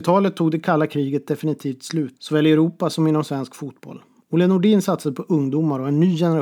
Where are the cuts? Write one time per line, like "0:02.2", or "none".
none